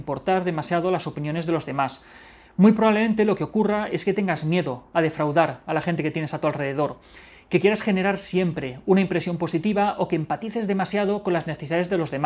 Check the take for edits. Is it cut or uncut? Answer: uncut